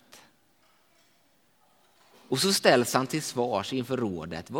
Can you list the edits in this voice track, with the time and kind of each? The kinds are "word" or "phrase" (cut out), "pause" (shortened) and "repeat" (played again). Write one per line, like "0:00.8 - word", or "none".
none